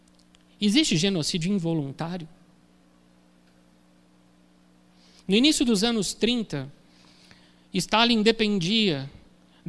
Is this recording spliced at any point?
no; 0 cuts

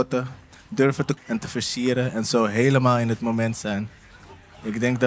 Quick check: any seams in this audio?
yes; 1 cut; at 1.2 s

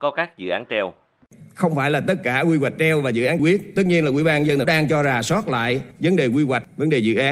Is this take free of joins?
no; 2 cuts; at 3.4 s, 4.6 s

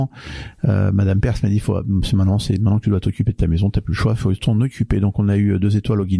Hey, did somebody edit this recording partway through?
no; 0 cuts

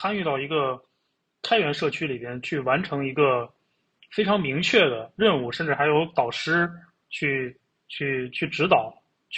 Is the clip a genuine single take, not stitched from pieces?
yes; 0 cuts

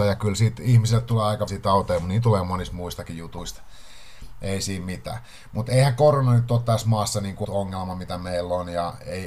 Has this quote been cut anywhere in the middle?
yes; 2 cuts; at 1.5 s, 7.4 s

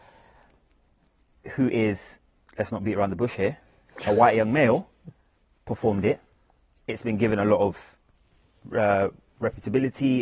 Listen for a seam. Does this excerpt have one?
no; 0 cuts

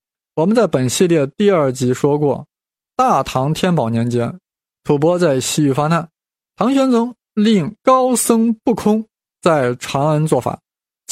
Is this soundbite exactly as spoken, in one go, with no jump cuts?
yes; 0 cuts

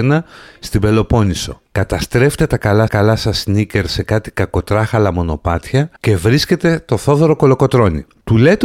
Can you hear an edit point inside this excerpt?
yes; 3 cuts; at 1.7 s, 2.9 s, 6.0 s

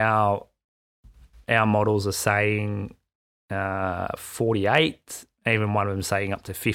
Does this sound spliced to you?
no; 0 cuts

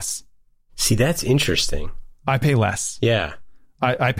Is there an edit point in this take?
yes; 1 cut; at 2.2 s

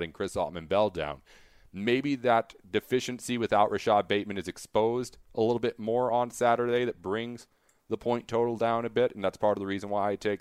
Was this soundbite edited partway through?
no; 0 cuts

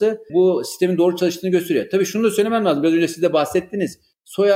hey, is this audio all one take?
yes; 0 cuts

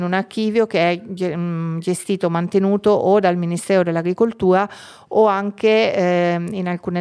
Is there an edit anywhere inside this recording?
no; 0 cuts

